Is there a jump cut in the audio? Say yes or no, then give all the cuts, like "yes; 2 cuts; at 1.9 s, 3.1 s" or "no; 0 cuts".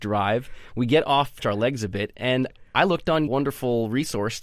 yes; 2 cuts; at 1.4 s, 3.3 s